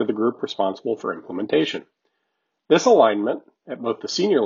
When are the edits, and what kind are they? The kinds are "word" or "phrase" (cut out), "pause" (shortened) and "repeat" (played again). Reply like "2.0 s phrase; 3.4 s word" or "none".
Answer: none